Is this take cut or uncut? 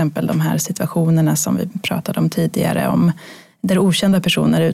uncut